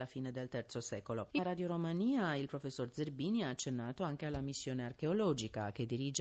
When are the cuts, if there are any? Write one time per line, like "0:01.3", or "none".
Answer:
0:01.4